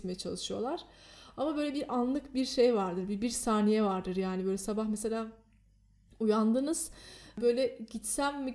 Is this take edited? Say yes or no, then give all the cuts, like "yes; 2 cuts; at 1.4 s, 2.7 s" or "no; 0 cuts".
no; 0 cuts